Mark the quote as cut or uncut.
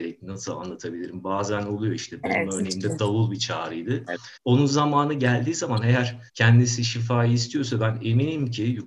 cut